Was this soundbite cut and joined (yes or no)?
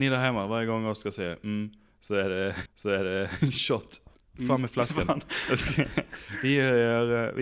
yes